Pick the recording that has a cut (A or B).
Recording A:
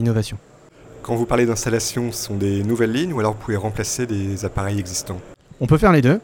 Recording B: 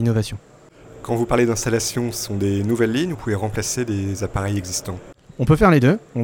B